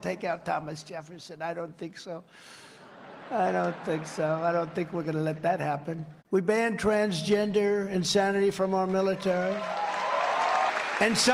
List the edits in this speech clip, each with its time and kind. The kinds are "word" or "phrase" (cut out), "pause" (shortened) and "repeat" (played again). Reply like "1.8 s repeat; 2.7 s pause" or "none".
6.2 s pause